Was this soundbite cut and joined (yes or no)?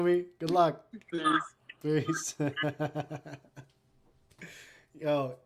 no